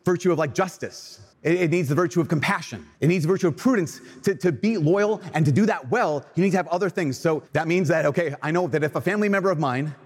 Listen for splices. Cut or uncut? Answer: cut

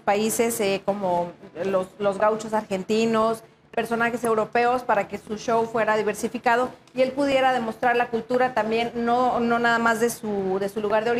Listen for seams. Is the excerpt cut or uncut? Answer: uncut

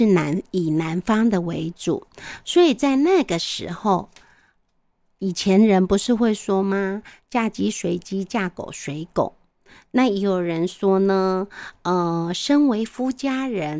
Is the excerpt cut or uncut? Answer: uncut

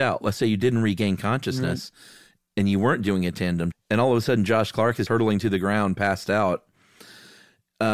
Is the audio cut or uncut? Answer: cut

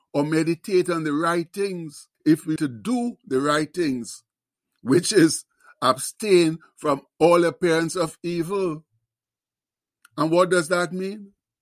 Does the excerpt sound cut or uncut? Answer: cut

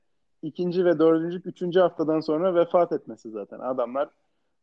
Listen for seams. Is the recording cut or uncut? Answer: cut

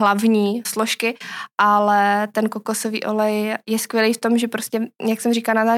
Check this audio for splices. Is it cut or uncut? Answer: uncut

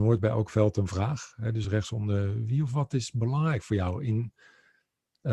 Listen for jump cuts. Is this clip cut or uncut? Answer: uncut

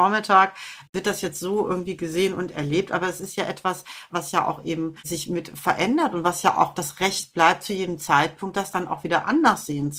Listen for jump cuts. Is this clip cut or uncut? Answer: cut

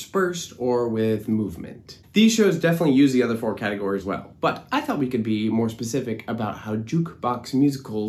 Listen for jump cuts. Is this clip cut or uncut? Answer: cut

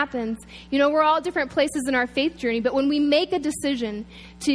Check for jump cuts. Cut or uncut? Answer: uncut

